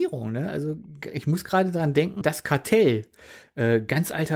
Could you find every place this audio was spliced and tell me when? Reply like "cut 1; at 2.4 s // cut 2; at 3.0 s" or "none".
cut 1; at 2.2 s